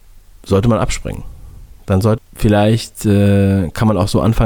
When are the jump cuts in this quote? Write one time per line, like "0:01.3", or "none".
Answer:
0:02.2